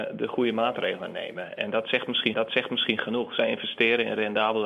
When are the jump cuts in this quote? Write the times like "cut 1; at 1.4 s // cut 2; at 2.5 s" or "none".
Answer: cut 1; at 2.3 s

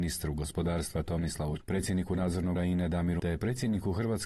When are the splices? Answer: cut 1; at 1.6 s // cut 2; at 2.6 s // cut 3; at 3.2 s

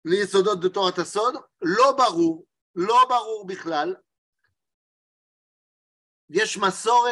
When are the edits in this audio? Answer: none

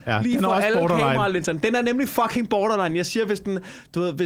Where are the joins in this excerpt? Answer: none

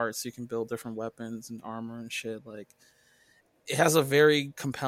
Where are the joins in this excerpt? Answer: none

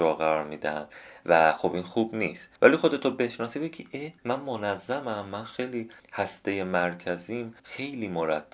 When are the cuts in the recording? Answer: cut 1; at 2.6 s // cut 2; at 4.2 s // cut 3; at 7.6 s

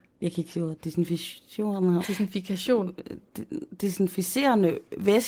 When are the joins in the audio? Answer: cut 1; at 2.0 s

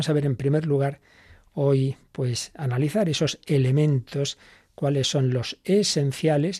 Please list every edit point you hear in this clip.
none

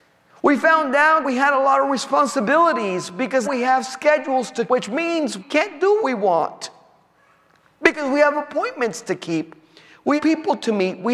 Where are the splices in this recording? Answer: cut 1; at 1.2 s // cut 2; at 3.4 s // cut 3; at 4.7 s // cut 4; at 5.4 s // cut 5; at 6.0 s // cut 6; at 10.2 s

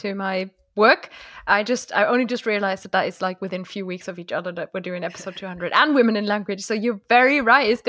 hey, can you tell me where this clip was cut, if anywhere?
none

